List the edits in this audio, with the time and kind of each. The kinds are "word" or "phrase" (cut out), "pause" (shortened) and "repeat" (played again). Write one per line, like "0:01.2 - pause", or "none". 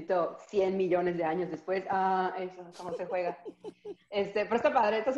0:02.7 - word